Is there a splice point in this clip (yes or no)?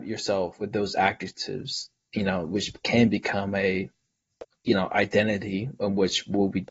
no